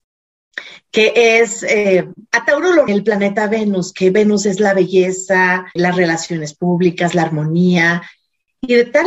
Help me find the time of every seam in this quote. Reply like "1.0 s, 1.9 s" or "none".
2.3 s, 2.9 s, 5.8 s